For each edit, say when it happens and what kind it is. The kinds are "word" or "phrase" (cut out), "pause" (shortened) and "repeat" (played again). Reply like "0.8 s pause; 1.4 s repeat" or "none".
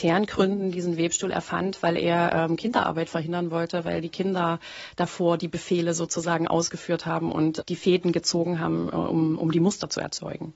7.6 s word